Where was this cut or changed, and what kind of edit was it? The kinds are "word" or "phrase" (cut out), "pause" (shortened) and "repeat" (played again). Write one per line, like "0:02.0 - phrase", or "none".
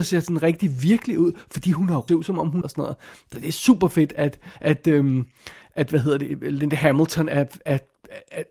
0:02.1 - phrase
0:02.6 - phrase
0:04.6 - pause